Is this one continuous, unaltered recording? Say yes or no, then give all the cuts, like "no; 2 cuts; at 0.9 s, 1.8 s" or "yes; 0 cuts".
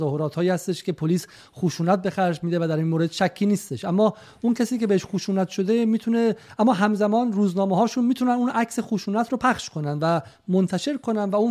yes; 0 cuts